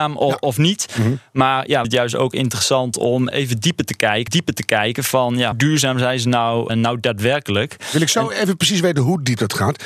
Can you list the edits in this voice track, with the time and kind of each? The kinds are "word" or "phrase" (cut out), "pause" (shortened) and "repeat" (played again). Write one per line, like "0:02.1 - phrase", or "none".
0:01.8 - phrase
0:03.3 - word
0:04.3 - repeat
0:05.5 - word
0:06.7 - word